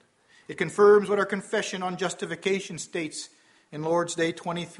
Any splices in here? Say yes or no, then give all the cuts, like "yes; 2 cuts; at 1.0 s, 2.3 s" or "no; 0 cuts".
no; 0 cuts